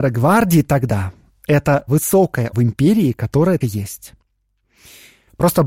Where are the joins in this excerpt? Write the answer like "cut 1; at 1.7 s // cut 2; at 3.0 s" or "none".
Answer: cut 1; at 1.9 s // cut 2; at 2.5 s // cut 3; at 3.6 s

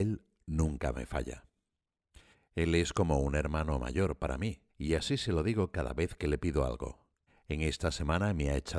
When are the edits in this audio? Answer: cut 1; at 2.3 s // cut 2; at 4.7 s // cut 3; at 7.3 s

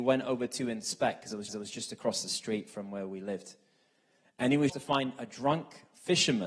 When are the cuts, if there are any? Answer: cut 1; at 1.5 s // cut 2; at 4.7 s

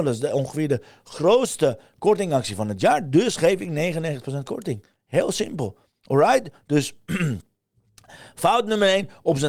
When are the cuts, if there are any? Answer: none

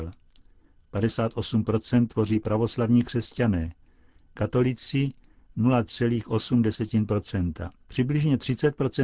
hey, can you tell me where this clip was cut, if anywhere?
cut 1; at 2.4 s // cut 2; at 7.8 s

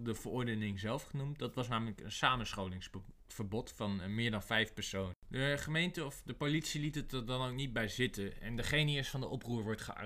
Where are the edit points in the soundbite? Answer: cut 1; at 5.2 s

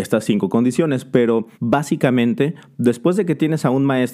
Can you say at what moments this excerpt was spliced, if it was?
cut 1; at 1.5 s

